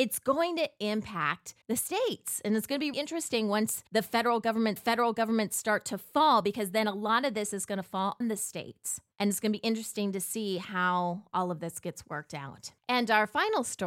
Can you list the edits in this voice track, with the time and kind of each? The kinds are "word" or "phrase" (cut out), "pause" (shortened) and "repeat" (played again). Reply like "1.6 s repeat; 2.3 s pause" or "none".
1.6 s pause; 2.9 s word; 3.9 s pause; 4.8 s repeat; 8.2 s word; 9.1 s pause; 12.8 s pause